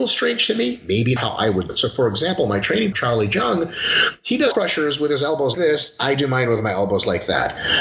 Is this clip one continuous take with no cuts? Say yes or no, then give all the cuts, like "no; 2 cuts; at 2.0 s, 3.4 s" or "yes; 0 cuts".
no; 5 cuts; at 1.2 s, 1.7 s, 2.9 s, 4.5 s, 5.5 s